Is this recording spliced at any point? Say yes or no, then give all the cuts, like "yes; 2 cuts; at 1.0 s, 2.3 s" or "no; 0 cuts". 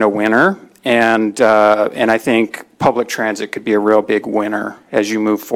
no; 0 cuts